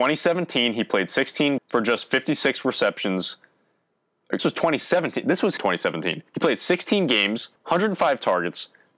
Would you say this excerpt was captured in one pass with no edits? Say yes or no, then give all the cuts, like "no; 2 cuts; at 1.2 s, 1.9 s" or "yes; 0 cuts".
no; 5 cuts; at 1.6 s, 4.4 s, 5.6 s, 6.3 s, 7.6 s